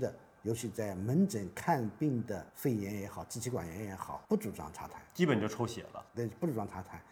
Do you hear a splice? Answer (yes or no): yes